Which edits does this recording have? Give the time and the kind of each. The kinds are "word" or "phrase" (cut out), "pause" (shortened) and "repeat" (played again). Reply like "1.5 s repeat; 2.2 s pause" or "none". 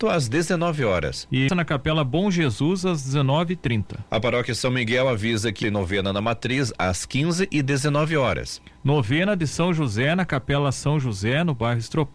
1.5 s word; 5.6 s phrase